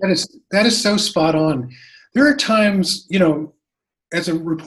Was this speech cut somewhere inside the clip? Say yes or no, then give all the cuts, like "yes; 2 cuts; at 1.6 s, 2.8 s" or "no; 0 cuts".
no; 0 cuts